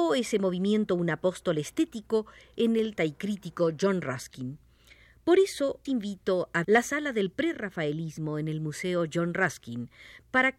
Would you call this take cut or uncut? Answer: cut